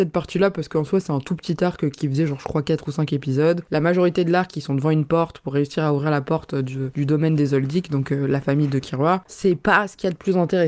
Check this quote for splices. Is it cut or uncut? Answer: uncut